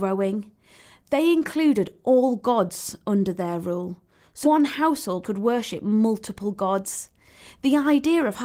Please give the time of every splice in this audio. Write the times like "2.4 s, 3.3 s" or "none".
4.4 s, 5.2 s